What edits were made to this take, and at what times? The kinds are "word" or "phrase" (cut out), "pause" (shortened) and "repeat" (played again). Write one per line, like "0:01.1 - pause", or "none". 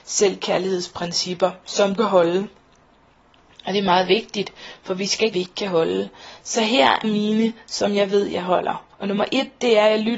0:02.0 - phrase
0:05.3 - phrase
0:07.0 - word
0:08.9 - pause

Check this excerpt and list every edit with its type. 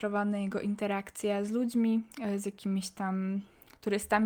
none

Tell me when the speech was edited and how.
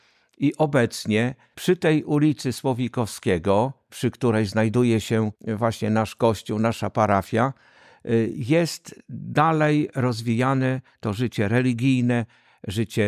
0:05.4 - pause

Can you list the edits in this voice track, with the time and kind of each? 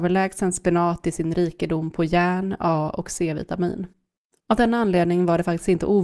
0:04.2 - pause

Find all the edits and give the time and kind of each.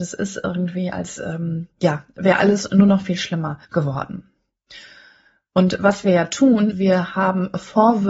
0:03.6 - pause
0:06.7 - word

